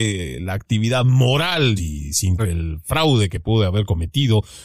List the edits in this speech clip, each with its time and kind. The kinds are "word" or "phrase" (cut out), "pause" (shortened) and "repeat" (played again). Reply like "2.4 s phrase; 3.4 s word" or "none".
1.8 s word; 2.4 s word